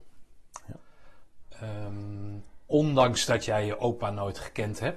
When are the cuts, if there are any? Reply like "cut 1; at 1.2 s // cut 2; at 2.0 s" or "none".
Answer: none